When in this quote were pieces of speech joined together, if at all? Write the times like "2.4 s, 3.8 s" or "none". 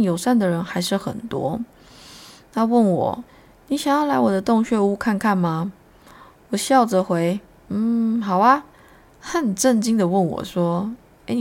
3.3 s, 8.7 s